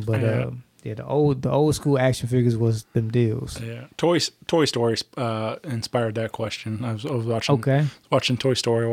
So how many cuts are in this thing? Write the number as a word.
zero